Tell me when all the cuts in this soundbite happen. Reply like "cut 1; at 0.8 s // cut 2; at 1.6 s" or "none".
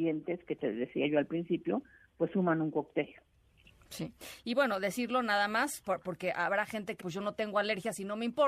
cut 1; at 7.0 s